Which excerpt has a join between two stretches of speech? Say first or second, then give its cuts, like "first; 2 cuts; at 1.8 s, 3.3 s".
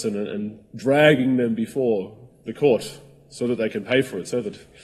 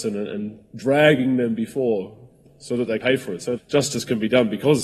second; 3 cuts; at 2.5 s, 3.0 s, 3.6 s